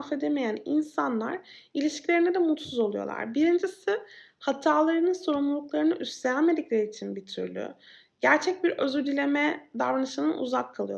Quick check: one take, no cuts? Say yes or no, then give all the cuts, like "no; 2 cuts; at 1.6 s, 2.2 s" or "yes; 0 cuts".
yes; 0 cuts